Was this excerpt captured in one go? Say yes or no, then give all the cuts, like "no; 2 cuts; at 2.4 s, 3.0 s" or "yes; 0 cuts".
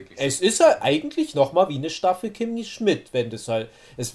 yes; 0 cuts